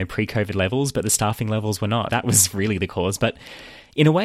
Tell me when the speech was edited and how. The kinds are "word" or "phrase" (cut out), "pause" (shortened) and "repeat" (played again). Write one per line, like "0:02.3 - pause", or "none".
0:02.1 - word